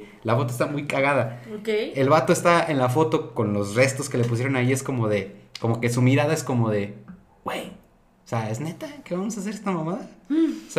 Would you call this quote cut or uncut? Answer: uncut